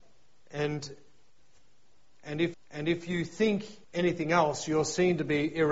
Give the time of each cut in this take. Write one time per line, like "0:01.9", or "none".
0:02.5
0:03.8